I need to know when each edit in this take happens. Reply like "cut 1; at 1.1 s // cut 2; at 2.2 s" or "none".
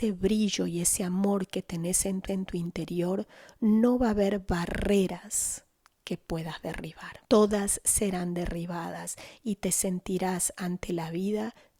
cut 1; at 2.3 s // cut 2; at 7.2 s